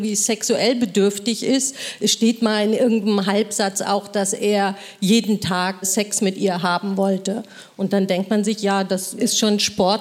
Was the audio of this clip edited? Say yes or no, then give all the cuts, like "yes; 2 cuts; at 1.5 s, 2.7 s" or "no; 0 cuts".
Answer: no; 0 cuts